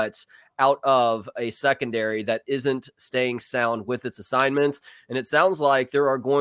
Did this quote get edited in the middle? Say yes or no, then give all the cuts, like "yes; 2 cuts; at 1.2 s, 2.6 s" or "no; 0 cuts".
no; 0 cuts